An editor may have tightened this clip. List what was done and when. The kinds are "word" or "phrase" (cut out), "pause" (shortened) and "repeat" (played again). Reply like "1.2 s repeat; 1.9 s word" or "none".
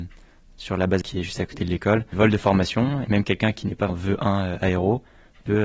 1.0 s word; 2.1 s word; 3.1 s word; 3.9 s word